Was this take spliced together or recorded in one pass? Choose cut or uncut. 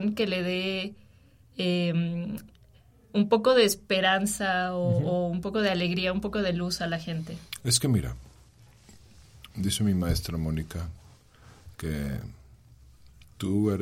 uncut